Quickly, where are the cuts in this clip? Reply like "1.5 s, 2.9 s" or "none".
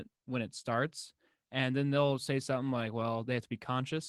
none